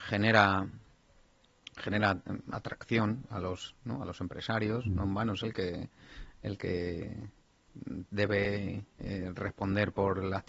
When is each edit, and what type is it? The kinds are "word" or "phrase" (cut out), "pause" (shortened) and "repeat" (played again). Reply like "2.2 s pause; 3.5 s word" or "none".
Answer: none